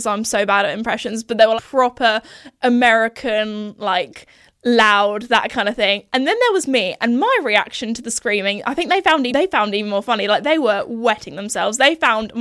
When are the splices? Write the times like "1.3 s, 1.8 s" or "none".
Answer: 1.6 s, 9.3 s